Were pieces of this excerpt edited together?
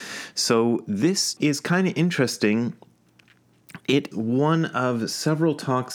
yes; 2 cuts; at 1.4 s, 4.1 s

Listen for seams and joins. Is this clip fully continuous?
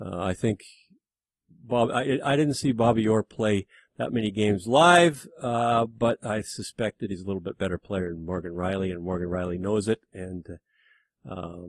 yes; 0 cuts

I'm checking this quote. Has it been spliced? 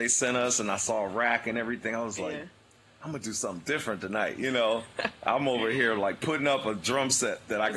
no; 0 cuts

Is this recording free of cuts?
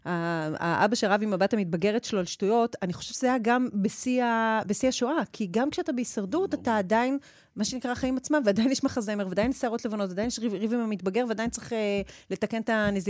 yes; 0 cuts

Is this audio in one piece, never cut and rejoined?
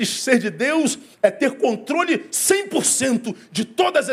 yes; 0 cuts

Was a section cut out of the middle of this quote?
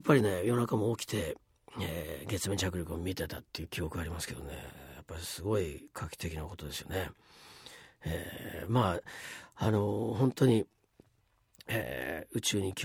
no; 0 cuts

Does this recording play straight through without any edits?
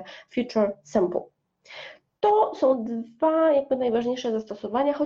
yes; 0 cuts

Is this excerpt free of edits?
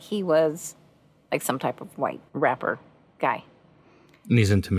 no; 1 cut; at 2.3 s

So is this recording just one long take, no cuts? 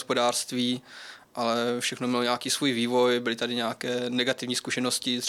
yes; 0 cuts

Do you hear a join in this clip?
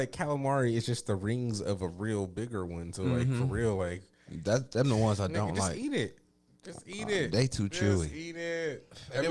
no; 0 cuts

